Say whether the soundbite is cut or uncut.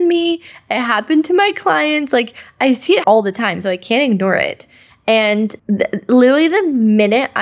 cut